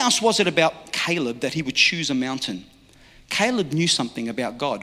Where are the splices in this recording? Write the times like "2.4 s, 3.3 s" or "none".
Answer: none